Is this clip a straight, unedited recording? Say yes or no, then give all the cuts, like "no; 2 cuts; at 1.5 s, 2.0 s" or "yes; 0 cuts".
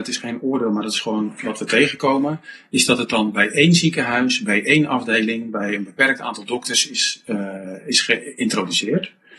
yes; 0 cuts